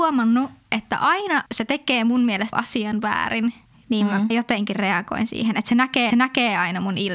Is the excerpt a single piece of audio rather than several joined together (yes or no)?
no